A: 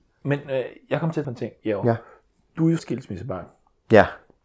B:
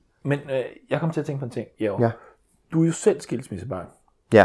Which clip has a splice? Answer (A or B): A